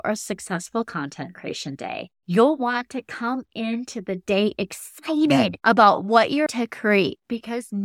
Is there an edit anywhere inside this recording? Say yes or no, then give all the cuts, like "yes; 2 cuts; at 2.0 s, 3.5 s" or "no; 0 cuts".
yes; 1 cut; at 6.5 s